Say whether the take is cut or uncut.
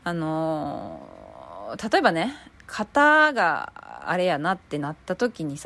cut